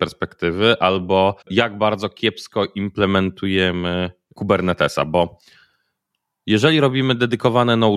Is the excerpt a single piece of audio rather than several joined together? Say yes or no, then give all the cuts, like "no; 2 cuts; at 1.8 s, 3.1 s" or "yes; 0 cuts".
no; 1 cut; at 1.4 s